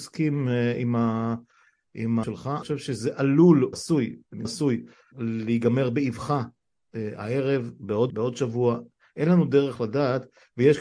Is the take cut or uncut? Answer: cut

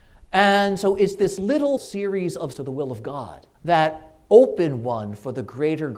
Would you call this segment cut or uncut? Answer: cut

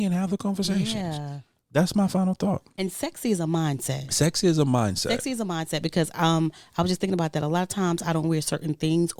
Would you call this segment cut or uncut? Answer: uncut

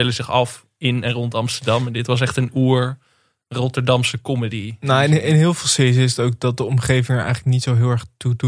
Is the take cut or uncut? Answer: uncut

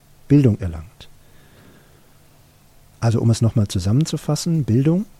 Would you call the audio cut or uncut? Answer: uncut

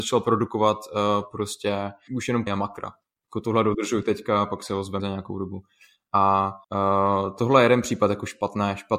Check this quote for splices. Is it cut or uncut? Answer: cut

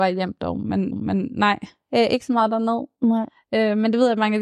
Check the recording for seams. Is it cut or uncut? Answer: cut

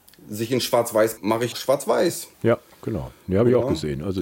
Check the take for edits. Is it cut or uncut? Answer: cut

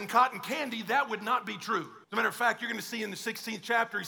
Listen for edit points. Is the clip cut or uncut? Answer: cut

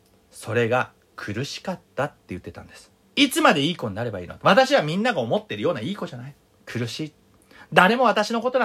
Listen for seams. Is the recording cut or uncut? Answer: cut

